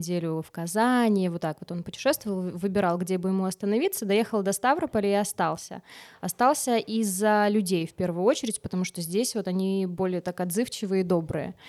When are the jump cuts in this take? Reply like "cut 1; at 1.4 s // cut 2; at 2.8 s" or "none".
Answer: none

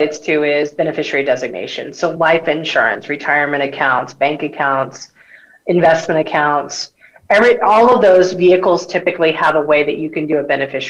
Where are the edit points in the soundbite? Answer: none

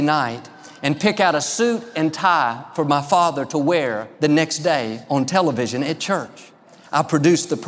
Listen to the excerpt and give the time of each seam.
cut 1; at 4.1 s

